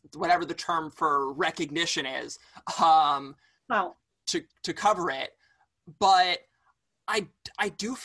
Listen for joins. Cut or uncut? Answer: uncut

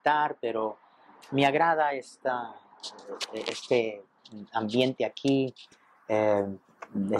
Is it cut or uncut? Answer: uncut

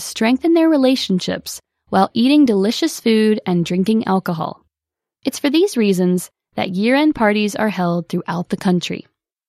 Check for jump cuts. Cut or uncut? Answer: uncut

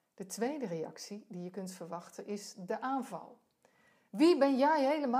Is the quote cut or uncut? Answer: uncut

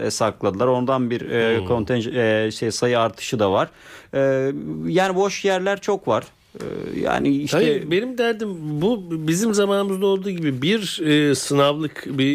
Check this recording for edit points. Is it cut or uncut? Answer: uncut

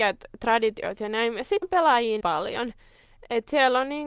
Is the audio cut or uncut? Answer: cut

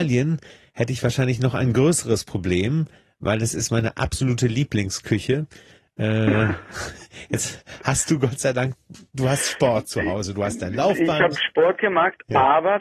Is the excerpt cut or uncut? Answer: uncut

